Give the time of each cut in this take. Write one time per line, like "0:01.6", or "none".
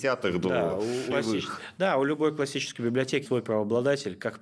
0:01.1
0:03.3